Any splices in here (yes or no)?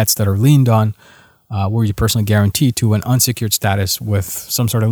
no